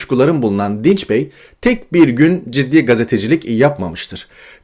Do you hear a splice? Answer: no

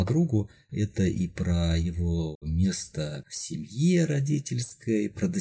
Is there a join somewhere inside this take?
no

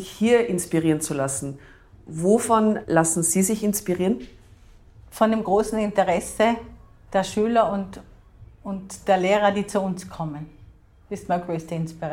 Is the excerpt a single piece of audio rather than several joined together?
yes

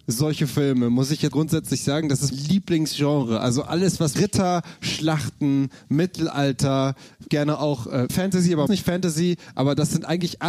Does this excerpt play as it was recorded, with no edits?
no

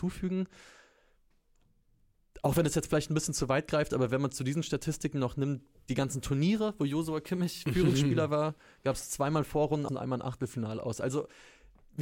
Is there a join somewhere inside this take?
yes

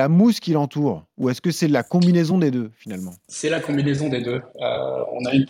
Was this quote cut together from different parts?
no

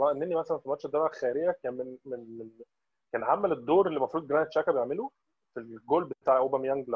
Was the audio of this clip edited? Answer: no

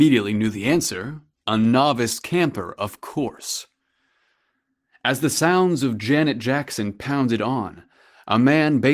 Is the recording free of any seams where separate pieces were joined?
yes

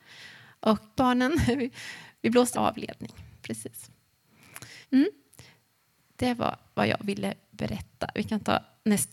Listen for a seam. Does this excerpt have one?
yes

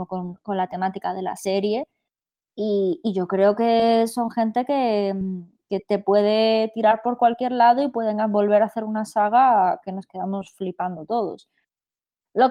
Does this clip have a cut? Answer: no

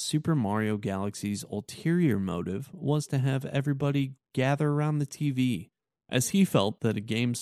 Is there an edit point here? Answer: yes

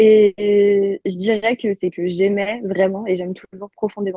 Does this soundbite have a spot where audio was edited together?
no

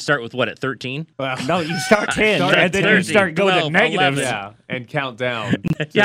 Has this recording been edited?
yes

